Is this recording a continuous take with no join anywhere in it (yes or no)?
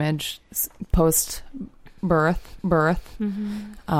no